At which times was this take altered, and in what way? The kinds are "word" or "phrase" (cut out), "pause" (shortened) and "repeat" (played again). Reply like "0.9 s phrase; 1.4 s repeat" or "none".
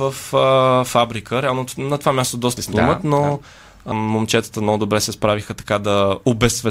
2.6 s phrase; 3.9 s word